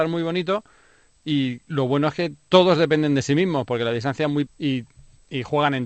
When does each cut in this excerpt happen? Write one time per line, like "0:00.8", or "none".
0:04.5